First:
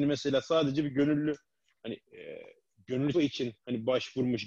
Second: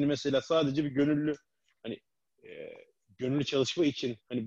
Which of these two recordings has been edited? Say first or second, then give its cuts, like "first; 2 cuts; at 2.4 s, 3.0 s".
first; 2 cuts; at 2.0 s, 3.1 s